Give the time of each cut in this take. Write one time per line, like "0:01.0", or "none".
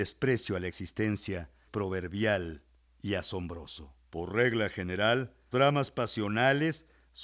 0:01.7
0:04.0
0:05.5